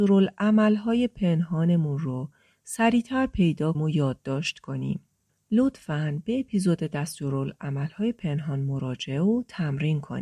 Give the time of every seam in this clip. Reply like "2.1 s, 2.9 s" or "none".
3.7 s